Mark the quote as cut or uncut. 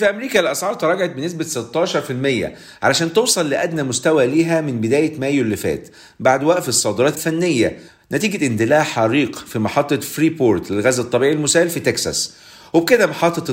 cut